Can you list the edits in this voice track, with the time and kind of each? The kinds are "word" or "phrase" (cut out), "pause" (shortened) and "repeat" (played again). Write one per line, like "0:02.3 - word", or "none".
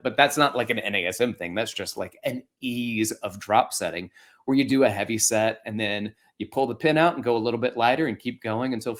none